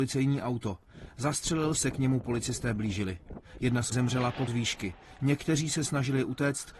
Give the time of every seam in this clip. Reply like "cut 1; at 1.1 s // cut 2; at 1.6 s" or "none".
cut 1; at 1.7 s // cut 2; at 3.9 s // cut 3; at 4.5 s